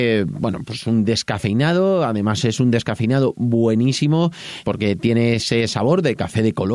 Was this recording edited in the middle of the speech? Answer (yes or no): yes